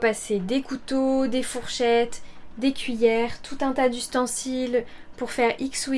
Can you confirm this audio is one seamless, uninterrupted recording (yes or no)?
yes